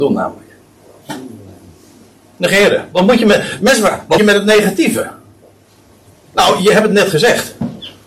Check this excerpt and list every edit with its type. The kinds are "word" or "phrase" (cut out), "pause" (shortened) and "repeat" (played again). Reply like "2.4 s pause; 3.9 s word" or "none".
4.2 s word